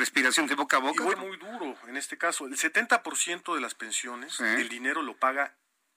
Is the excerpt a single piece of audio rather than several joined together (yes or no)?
no